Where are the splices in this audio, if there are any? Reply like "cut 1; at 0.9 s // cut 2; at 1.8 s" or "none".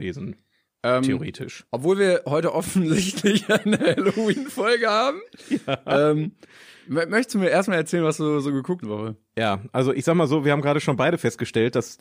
cut 1; at 8.8 s